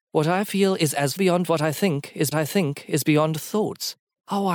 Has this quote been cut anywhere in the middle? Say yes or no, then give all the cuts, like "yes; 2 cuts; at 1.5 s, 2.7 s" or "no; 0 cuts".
yes; 3 cuts; at 1.2 s, 1.5 s, 2.3 s